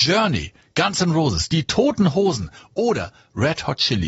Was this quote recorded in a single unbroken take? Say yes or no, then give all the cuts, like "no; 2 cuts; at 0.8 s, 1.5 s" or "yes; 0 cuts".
yes; 0 cuts